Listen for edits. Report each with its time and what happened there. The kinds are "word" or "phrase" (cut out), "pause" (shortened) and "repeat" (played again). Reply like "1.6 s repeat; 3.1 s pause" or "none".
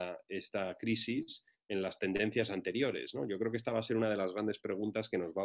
none